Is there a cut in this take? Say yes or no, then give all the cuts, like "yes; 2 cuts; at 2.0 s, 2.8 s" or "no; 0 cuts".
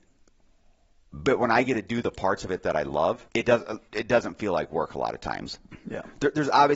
yes; 2 cuts; at 3.3 s, 3.9 s